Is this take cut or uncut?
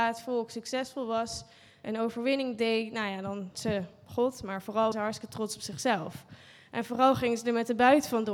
cut